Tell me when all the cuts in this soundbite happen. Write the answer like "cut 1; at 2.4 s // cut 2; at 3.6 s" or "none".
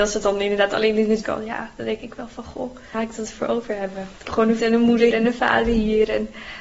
cut 1; at 1.2 s // cut 2; at 2.9 s // cut 3; at 4.3 s // cut 4; at 4.6 s // cut 5; at 5.1 s